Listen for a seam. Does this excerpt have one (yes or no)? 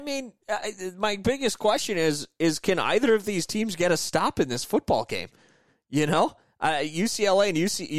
no